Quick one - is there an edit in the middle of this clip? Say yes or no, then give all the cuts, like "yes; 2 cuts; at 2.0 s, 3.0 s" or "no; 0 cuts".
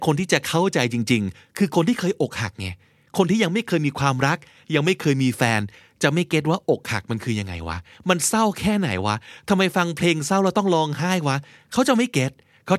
no; 0 cuts